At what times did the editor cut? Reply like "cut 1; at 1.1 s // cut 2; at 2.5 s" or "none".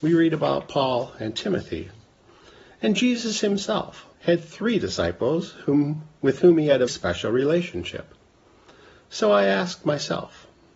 cut 1; at 4.1 s // cut 2; at 6.9 s